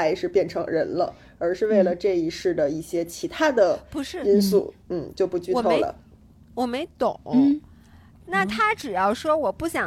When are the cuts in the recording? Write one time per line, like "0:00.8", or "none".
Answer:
0:04.8